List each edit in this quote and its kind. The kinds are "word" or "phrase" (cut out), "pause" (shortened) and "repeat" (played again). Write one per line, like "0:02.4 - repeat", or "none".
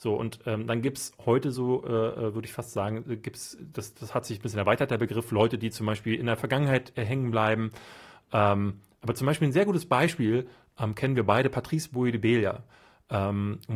none